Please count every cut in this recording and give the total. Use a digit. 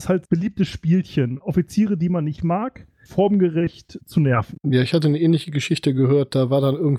3